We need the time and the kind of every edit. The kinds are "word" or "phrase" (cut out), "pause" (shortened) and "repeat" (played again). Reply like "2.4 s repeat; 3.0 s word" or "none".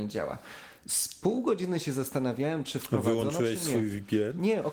none